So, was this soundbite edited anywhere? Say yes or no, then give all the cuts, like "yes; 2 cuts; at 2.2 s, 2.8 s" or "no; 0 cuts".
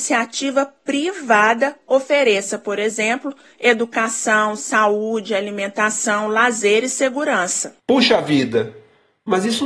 yes; 1 cut; at 7.8 s